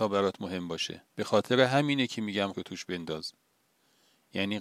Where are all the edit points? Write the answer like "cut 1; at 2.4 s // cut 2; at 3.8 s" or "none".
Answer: cut 1; at 1.1 s // cut 2; at 2.5 s